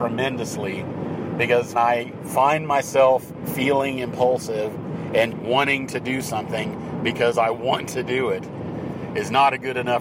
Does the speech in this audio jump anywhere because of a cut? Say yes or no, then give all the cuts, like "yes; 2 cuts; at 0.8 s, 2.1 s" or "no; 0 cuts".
yes; 2 cuts; at 1.7 s, 5.3 s